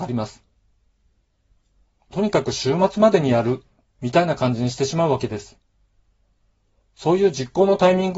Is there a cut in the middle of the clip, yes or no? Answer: no